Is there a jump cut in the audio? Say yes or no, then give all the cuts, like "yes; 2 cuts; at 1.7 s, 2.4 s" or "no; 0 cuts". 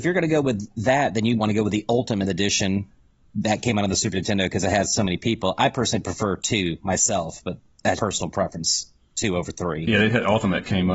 yes; 2 cuts; at 1.4 s, 8.0 s